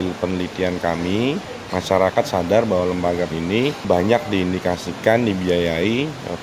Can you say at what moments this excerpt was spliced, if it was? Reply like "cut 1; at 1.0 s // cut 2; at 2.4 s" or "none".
cut 1; at 3.3 s